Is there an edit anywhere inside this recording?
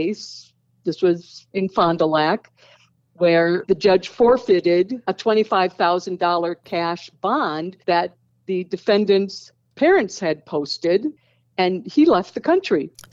yes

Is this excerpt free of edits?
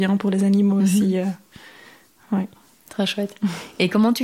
yes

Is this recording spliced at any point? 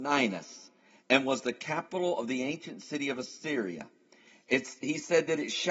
no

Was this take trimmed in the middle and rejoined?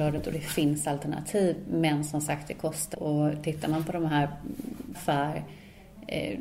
yes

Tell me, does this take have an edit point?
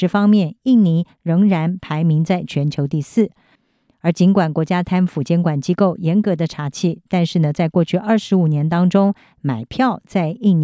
no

